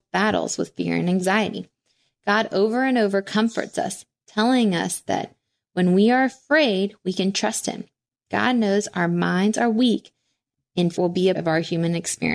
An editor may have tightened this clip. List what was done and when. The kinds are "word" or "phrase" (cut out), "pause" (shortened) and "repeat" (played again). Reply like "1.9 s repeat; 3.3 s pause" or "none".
11.0 s word; 11.3 s word